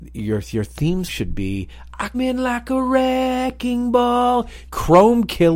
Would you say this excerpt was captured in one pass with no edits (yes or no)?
no